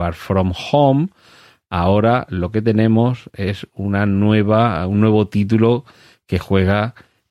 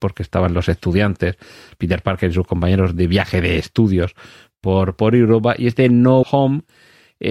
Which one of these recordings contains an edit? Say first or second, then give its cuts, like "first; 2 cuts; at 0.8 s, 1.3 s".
second; 1 cut; at 6.2 s